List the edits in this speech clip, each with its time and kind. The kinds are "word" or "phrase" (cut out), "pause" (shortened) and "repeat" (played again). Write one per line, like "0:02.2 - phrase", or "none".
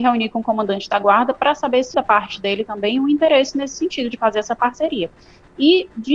0:01.9 - word

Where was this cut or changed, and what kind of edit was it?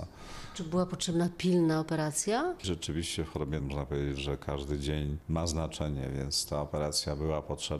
0:03.6 - word

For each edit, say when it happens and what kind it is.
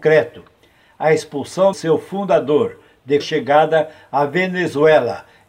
0:01.7 - word
0:03.2 - phrase

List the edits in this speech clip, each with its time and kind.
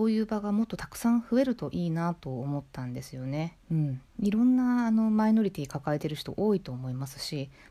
0:03.6 - pause
0:04.1 - pause

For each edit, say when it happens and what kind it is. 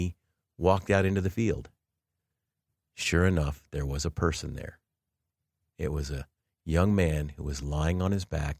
none

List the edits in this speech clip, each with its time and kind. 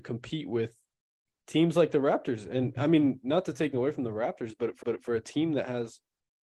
0:03.7 - word
0:04.8 - repeat

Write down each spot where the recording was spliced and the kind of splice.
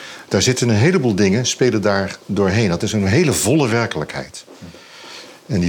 0:02.2 - pause

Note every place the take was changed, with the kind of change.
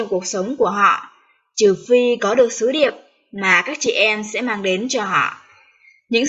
none

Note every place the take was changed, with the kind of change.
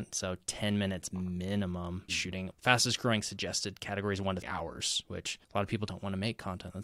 0:02.1 - word
0:02.5 - word
0:04.4 - word
0:05.4 - pause

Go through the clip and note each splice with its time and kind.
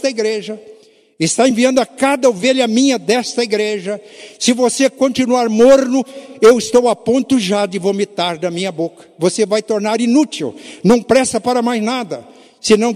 none

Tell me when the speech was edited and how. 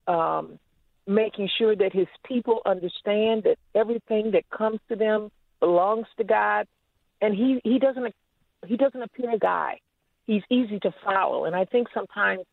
0:09.4 - phrase

